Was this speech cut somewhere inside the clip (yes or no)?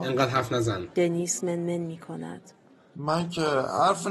yes